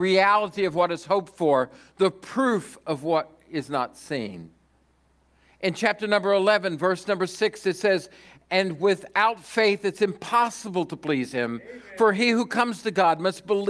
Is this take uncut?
yes; 0 cuts

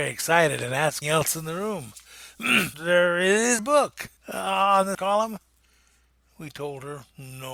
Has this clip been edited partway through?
yes; 5 cuts; at 1.0 s, 2.7 s, 3.6 s, 4.2 s, 4.9 s

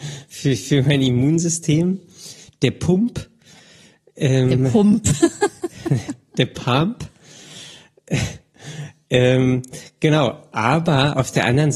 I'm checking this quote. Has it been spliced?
no; 0 cuts

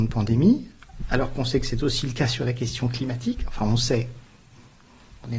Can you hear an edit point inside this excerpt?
no; 0 cuts

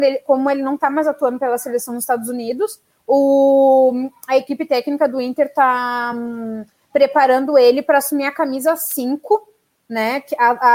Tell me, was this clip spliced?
no; 0 cuts

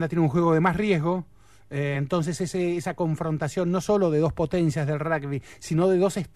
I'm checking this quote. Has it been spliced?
no; 0 cuts

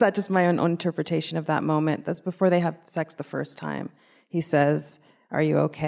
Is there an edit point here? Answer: no; 0 cuts

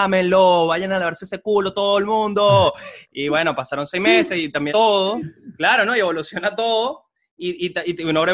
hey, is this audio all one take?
no; 1 cut; at 4.7 s

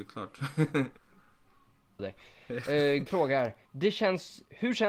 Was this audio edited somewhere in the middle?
yes; 4 cuts; at 1.0 s, 2.0 s, 3.1 s, 3.7 s

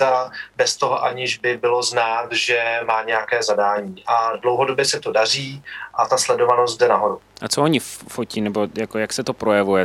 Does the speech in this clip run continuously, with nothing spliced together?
yes; 0 cuts

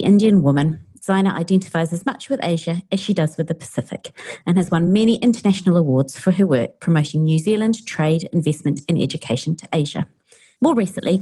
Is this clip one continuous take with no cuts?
yes; 0 cuts

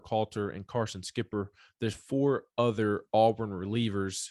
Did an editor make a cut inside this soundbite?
no; 0 cuts

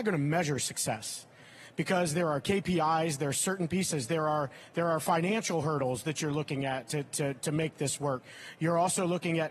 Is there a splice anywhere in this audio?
no; 0 cuts

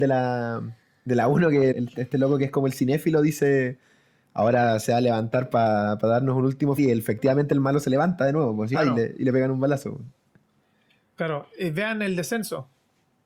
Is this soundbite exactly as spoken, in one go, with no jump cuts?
no; 3 cuts; at 1.7 s, 6.8 s, 8.7 s

